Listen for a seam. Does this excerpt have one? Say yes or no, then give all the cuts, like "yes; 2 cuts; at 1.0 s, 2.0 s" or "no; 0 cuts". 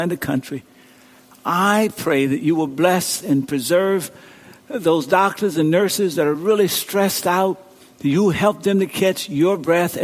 no; 0 cuts